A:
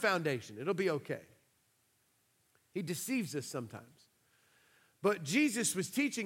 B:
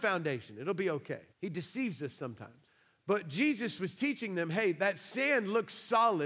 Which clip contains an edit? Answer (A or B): B